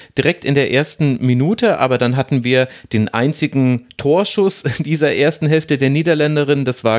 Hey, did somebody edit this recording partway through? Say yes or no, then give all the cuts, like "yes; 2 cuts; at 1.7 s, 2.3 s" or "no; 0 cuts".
no; 0 cuts